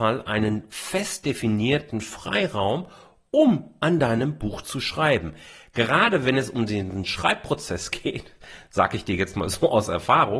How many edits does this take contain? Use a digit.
0